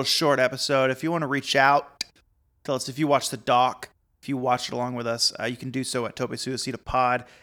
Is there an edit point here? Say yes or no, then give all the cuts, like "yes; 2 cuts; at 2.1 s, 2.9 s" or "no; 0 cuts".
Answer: no; 0 cuts